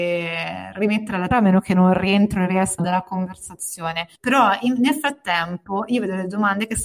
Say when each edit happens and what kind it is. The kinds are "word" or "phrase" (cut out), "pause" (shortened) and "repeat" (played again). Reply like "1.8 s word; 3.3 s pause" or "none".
1.3 s word; 2.8 s word; 4.1 s pause